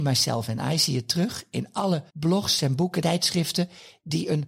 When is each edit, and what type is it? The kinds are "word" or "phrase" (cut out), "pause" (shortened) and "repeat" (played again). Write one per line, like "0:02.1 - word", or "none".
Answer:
0:02.1 - pause
0:03.0 - word